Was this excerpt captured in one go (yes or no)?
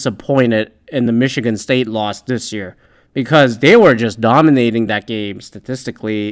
yes